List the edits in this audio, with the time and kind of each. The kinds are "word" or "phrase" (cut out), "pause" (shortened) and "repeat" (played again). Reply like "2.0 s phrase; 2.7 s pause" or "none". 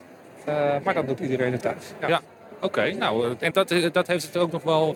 1.6 s word; 3.5 s word

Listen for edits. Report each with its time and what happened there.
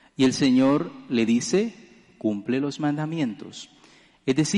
none

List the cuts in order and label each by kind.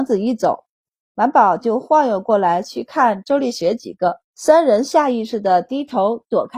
4.2 s pause

